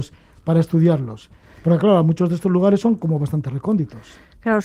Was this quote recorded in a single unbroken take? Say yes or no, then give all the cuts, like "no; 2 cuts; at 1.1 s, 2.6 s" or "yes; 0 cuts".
yes; 0 cuts